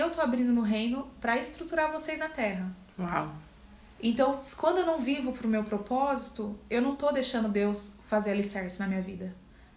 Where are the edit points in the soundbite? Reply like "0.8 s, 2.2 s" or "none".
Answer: none